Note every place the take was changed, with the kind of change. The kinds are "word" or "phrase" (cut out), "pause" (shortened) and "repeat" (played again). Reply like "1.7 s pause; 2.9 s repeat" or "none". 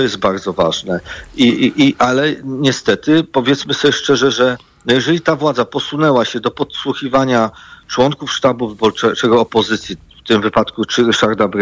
none

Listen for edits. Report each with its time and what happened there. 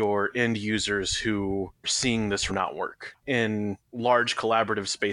1.8 s word; 2.5 s word

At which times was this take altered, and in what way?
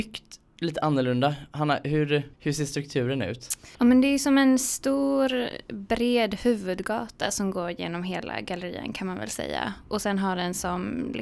2.3 s pause; 3.7 s pause

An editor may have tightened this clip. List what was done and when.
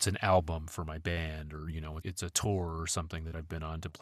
2.0 s word

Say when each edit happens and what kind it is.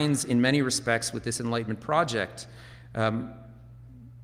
none

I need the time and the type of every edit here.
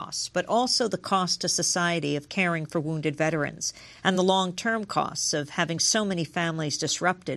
none

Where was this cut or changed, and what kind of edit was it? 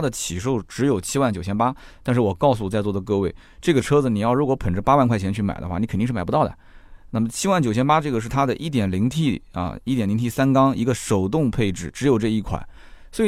none

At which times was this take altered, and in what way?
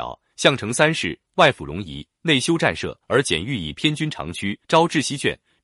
3.0 s pause; 4.6 s pause

